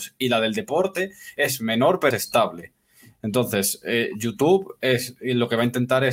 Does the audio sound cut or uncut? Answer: cut